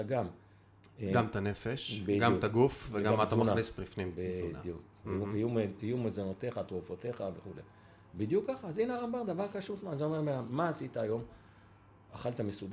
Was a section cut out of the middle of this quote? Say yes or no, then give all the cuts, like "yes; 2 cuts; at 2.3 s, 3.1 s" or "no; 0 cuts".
no; 0 cuts